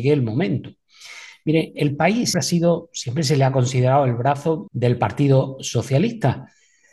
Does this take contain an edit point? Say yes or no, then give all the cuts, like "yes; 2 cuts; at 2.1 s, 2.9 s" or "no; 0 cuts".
yes; 3 cuts; at 1.7 s, 2.3 s, 4.7 s